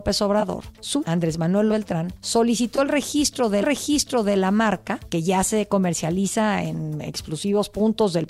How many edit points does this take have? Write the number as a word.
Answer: three